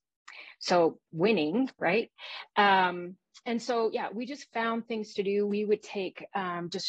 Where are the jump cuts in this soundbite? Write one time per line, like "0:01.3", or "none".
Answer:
0:01.0